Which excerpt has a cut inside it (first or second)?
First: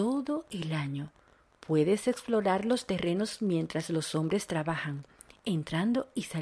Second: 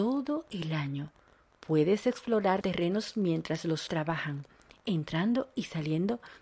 second